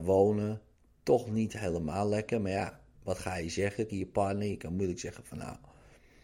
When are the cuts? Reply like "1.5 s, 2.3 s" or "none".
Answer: 3.9 s